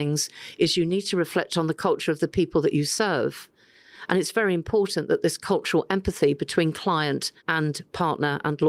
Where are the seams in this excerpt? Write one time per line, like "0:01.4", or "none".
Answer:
0:07.4